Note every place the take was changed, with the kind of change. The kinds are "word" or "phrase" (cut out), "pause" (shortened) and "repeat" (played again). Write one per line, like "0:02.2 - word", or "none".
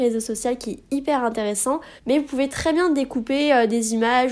0:02.0 - pause

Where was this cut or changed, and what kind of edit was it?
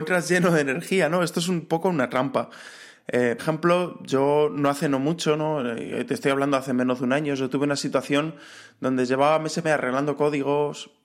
0:03.4 - word
0:09.6 - word

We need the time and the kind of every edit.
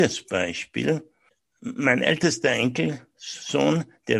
0:01.3 - pause

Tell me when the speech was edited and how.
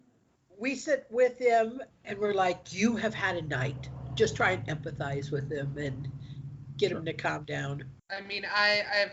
0:08.0 - pause

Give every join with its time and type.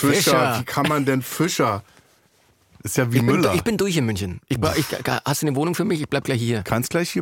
none

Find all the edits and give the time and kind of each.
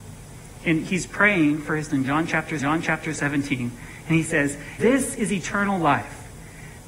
0:01.9 - word
0:02.6 - repeat
0:04.8 - word

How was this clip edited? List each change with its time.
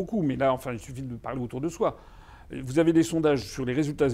none

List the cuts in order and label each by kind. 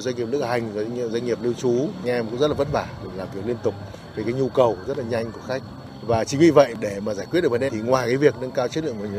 0:01.1 - word
0:02.0 - word
0:03.1 - word
0:04.9 - word
0:07.7 - word

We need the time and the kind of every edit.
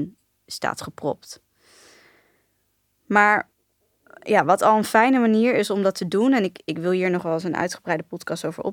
none

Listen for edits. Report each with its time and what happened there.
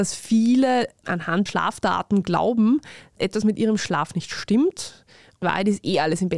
0:01.5 - word
0:03.2 - word
0:05.4 - word

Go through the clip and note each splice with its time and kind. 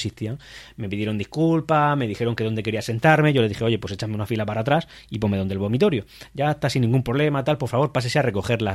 none

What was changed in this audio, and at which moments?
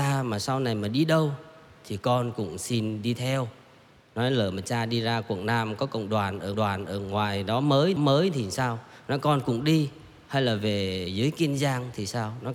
0:06.5 - repeat
0:08.0 - repeat

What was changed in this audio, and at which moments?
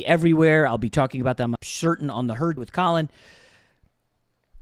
0:01.6 - word
0:02.6 - word

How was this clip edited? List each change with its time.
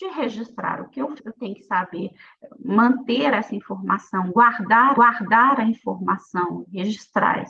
0:01.2 - word
0:04.9 - repeat

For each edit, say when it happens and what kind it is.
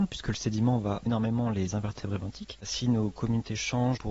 0:01.1 - word

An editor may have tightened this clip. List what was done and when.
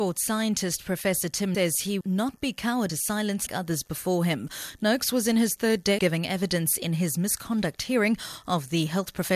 0:01.5 - word
0:02.0 - word
0:02.9 - word
0:03.5 - word
0:06.0 - word

